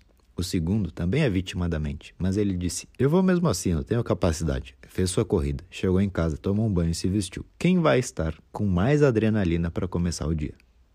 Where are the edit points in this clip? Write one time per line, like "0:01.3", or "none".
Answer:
0:07.5